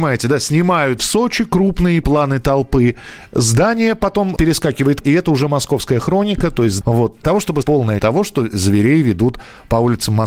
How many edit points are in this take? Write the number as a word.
eight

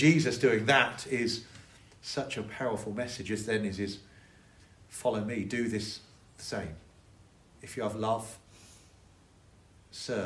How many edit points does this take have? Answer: zero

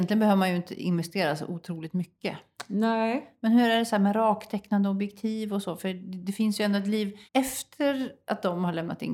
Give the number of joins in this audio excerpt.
one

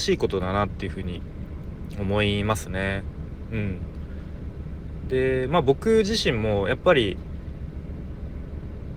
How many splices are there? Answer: zero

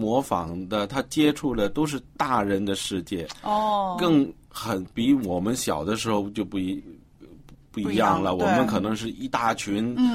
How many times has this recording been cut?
zero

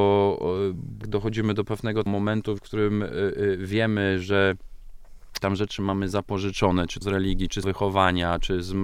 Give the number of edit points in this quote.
six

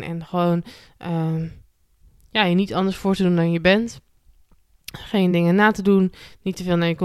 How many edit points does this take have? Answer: zero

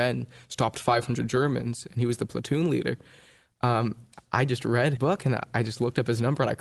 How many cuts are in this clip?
one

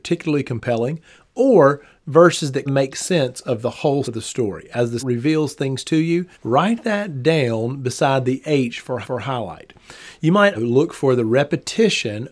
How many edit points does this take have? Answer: six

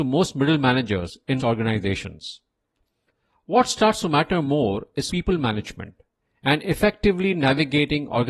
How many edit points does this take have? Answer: two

